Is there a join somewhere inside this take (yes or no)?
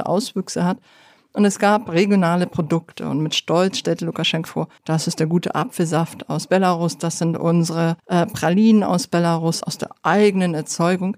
yes